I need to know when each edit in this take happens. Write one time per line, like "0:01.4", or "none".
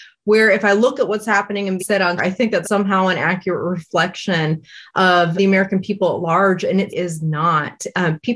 0:01.8
0:02.2
0:02.6
0:05.3
0:06.9